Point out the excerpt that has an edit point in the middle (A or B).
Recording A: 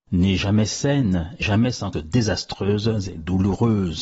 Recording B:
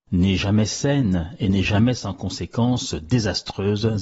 A